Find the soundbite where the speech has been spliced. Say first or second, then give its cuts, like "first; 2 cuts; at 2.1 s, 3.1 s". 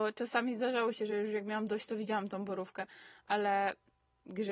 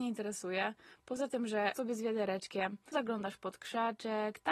second; 2 cuts; at 1.7 s, 2.9 s